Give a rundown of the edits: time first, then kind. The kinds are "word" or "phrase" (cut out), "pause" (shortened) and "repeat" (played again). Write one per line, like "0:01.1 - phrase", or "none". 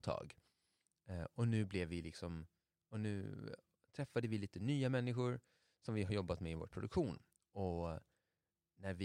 0:06.7 - word